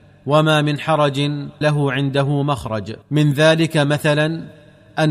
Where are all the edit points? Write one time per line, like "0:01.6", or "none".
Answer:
0:01.6
0:03.0